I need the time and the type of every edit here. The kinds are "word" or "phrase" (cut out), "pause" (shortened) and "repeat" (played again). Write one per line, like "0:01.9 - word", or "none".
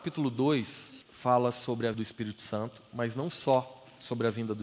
0:01.0 - pause
0:01.9 - word

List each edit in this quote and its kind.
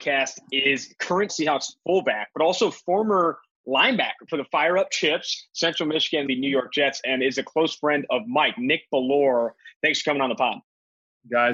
0:01.3 - word
0:04.3 - phrase
0:06.3 - word

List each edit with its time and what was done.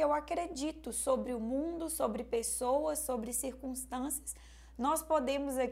none

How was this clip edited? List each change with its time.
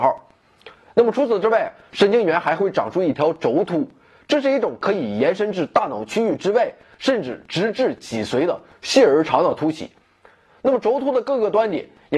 none

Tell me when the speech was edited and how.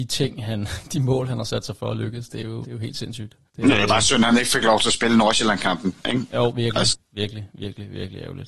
0:02.6 - word
0:03.5 - pause

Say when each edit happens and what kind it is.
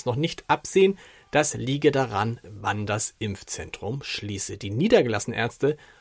none

